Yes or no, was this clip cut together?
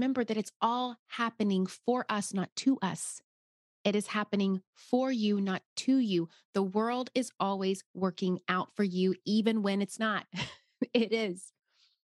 no